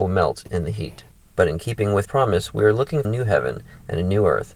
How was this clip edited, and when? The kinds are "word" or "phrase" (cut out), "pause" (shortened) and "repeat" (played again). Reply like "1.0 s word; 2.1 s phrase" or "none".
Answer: 1.1 s pause; 2.0 s word; 3.0 s phrase